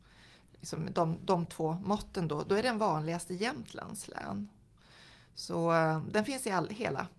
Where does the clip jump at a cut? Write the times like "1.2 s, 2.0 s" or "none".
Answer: none